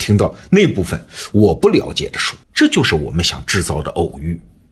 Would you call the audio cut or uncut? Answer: cut